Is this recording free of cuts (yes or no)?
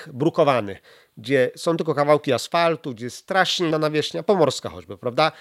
no